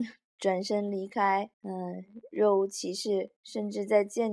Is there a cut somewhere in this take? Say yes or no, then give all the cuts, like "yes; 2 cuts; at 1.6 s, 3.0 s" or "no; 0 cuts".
yes; 2 cuts; at 1.5 s, 3.4 s